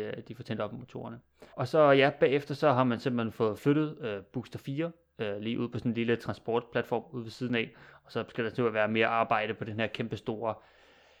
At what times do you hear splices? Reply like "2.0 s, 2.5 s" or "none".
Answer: 1.5 s